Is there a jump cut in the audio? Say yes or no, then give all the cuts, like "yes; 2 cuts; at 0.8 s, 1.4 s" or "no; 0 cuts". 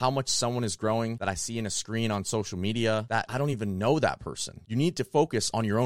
no; 0 cuts